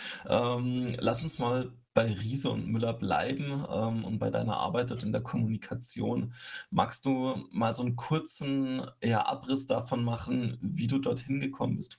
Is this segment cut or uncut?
uncut